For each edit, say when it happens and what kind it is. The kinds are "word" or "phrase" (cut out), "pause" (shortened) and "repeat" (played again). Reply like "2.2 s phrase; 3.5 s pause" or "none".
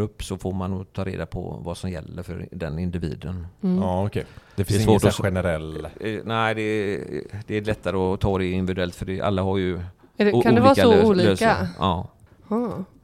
none